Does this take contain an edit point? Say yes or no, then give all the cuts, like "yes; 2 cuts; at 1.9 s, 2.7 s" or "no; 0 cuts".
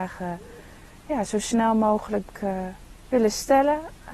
no; 0 cuts